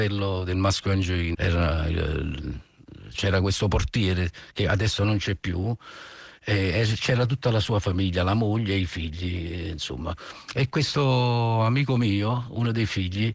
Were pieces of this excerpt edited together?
yes; 2 cuts; at 1.3 s, 3.1 s

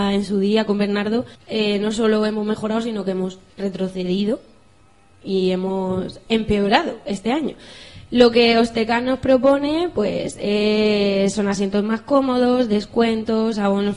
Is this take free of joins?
no; 2 cuts; at 1.3 s, 3.5 s

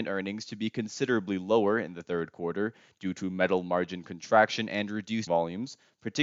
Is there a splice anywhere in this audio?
yes; 1 cut; at 5.3 s

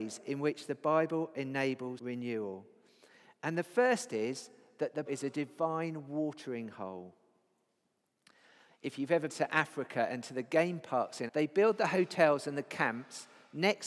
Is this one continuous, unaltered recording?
no; 4 cuts; at 2.0 s, 5.1 s, 9.3 s, 11.3 s

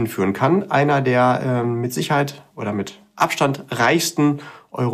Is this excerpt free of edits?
yes; 0 cuts

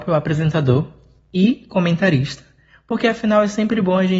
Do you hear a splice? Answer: no; 0 cuts

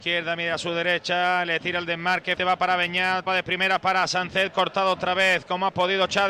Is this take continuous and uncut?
no; 3 cuts; at 2.4 s, 3.3 s, 4.5 s

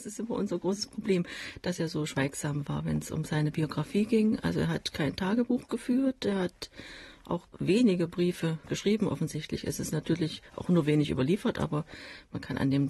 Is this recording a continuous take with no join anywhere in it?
yes; 0 cuts

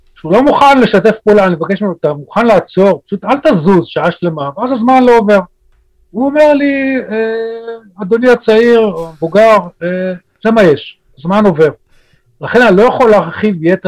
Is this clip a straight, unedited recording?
yes; 0 cuts

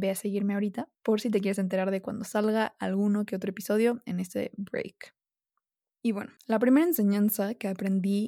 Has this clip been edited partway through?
yes; 2 cuts; at 0.9 s, 6.4 s

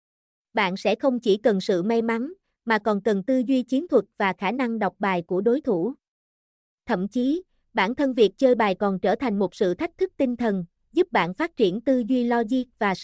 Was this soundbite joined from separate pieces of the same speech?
no; 0 cuts

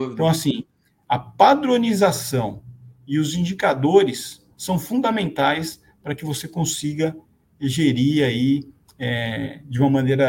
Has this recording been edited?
no; 0 cuts

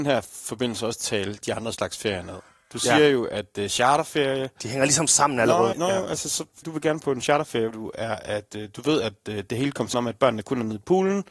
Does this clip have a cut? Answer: yes; 4 cuts; at 5.7 s, 6.6 s, 7.7 s, 9.9 s

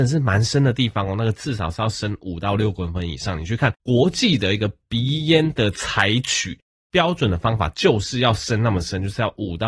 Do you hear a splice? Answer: yes; 1 cut; at 3.8 s

